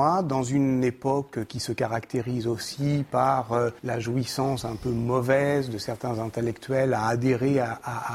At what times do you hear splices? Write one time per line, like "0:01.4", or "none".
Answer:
0:03.8